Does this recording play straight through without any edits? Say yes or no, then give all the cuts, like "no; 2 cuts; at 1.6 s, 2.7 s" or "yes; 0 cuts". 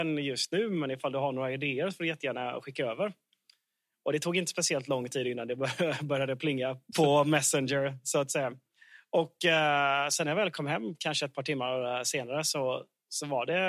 no; 1 cut; at 6.9 s